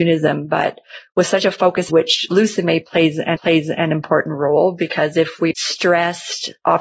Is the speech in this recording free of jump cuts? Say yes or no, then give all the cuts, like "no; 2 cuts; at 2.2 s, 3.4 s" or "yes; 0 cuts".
no; 3 cuts; at 1.9 s, 3.4 s, 5.5 s